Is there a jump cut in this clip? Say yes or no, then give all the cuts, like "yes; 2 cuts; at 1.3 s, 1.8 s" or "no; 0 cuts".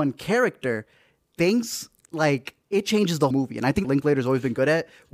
yes; 3 cuts; at 2.6 s, 3.3 s, 3.8 s